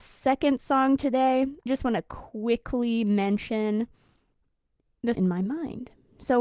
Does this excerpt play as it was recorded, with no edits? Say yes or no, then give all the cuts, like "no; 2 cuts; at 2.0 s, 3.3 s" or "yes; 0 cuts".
no; 2 cuts; at 1.7 s, 5.1 s